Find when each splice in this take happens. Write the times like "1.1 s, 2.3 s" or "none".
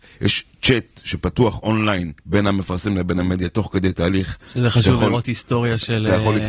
2.2 s